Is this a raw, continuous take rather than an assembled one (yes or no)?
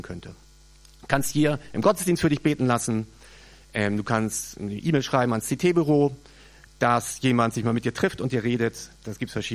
yes